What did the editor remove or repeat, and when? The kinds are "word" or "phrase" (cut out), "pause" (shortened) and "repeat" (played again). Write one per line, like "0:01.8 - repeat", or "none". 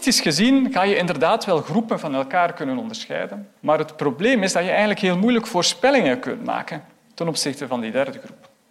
0:03.6 - pause